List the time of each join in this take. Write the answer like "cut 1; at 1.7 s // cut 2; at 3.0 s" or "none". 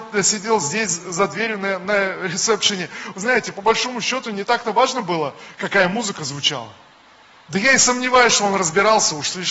none

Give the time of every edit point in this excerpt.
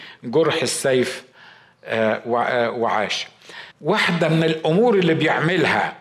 cut 1; at 3.7 s

